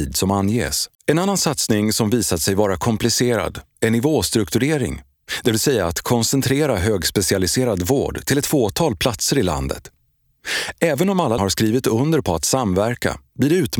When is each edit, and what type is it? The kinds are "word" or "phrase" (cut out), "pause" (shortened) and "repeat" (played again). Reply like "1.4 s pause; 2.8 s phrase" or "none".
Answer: 0.9 s pause; 11.4 s word